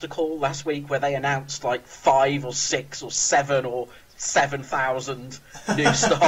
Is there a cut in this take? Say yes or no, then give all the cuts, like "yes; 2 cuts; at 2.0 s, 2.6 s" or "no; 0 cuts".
no; 0 cuts